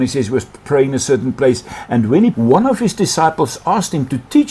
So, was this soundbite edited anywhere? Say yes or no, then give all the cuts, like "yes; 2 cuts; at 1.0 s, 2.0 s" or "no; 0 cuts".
yes; 1 cut; at 2.3 s